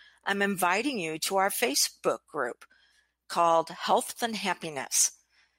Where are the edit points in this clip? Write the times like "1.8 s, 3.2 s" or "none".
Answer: 4.1 s